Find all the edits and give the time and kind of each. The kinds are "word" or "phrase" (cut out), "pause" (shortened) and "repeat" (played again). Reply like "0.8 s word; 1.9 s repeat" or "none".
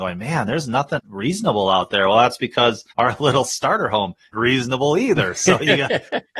1.0 s word; 2.9 s pause; 4.3 s word

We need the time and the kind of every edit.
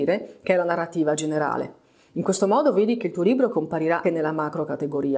3.5 s word; 4.0 s word

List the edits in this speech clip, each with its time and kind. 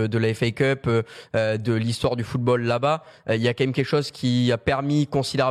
none

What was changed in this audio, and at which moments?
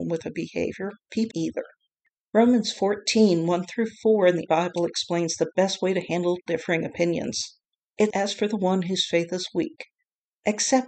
1.3 s word; 4.5 s word; 8.1 s word

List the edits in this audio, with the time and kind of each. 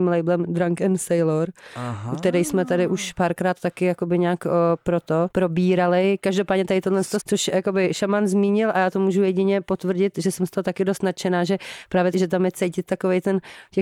5.3 s pause; 7.2 s word; 12.1 s word

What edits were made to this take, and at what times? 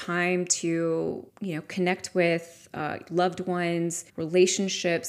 1.3 s pause; 4.1 s pause

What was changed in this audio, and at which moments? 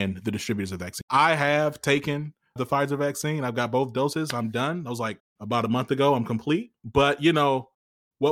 1.0 s word; 2.6 s word

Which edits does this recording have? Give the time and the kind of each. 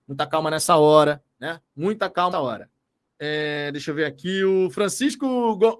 1.7 s pause; 2.3 s word; 3.1 s pause

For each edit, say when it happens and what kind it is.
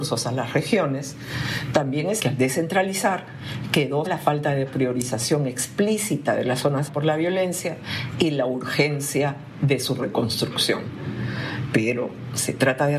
2.2 s word; 4.1 s word; 6.9 s word

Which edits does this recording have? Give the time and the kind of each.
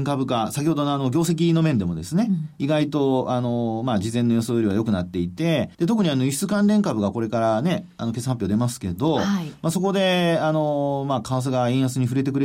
5.7 s pause

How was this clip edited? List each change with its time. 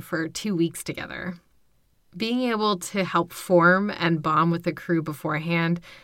none

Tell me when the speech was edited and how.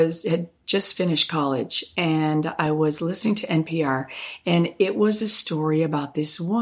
none

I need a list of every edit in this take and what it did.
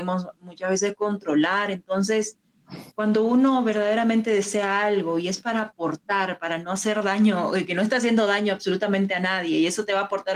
2.9 s pause

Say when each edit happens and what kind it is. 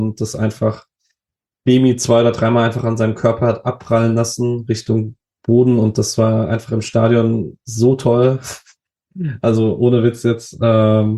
none

